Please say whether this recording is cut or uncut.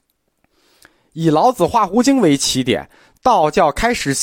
uncut